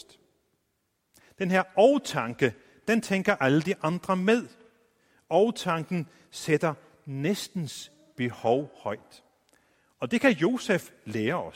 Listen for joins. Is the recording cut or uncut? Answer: uncut